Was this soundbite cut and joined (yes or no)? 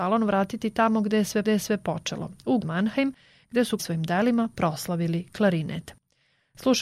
yes